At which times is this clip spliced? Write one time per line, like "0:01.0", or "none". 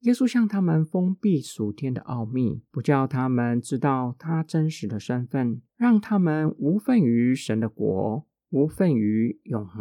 0:02.7
0:05.7
0:08.4